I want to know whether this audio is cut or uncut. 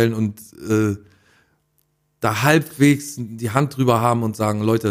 uncut